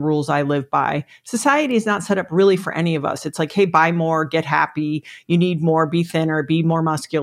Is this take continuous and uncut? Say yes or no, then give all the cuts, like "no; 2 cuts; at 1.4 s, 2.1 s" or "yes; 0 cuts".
yes; 0 cuts